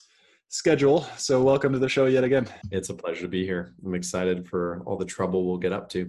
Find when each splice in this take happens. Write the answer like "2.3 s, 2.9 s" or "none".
2.6 s